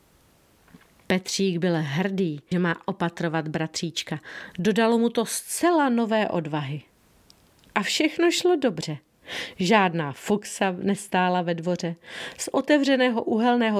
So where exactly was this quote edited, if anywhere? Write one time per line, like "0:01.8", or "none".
0:02.5